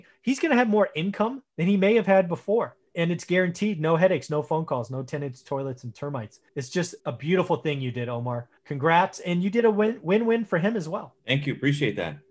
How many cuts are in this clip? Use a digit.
6